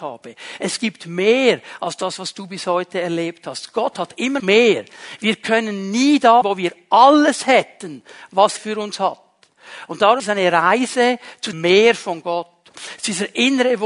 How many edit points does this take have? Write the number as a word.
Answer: five